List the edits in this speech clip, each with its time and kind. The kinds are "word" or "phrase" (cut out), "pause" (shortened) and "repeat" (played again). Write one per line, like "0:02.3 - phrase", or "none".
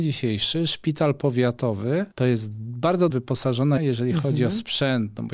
0:02.1 - pause
0:03.1 - word
0:03.8 - word